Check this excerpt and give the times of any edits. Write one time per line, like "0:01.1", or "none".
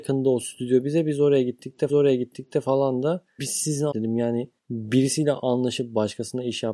0:01.9
0:03.4
0:03.9
0:04.6